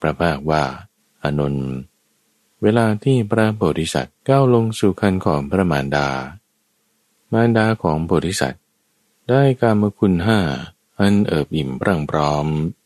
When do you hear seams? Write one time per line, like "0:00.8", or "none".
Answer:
0:01.0
0:04.2